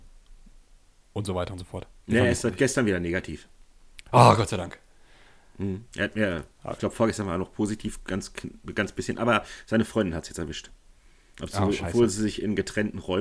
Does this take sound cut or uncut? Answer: cut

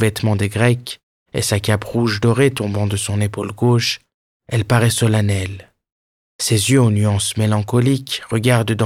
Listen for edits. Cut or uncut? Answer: uncut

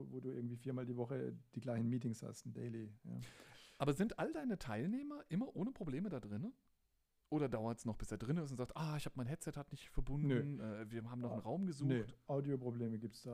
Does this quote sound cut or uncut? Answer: uncut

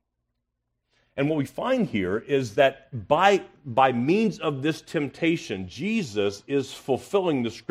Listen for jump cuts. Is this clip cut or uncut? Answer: uncut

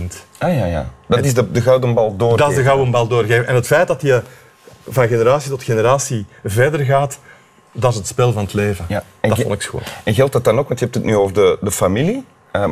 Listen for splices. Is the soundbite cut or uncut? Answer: uncut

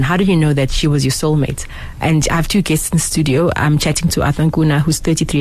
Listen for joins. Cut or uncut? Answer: uncut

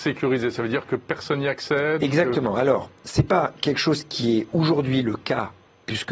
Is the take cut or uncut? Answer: uncut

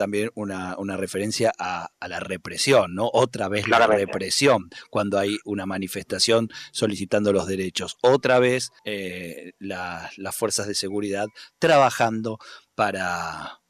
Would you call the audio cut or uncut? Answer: cut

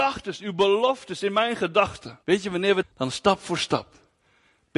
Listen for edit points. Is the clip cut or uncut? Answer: cut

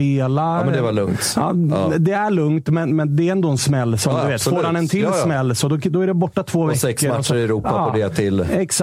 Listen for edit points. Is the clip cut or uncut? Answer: uncut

